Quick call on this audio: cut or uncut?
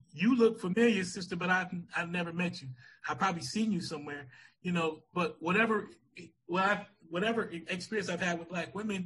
uncut